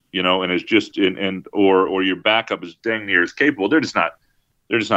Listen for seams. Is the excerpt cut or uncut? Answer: cut